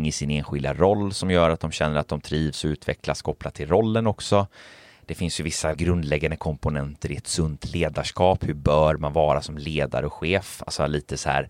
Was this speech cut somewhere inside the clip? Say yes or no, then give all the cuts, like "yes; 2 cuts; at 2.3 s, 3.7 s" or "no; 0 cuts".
yes; 1 cut; at 5.7 s